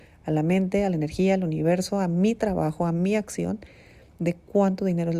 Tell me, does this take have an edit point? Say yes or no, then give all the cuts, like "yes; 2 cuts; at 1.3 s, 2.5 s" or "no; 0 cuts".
no; 0 cuts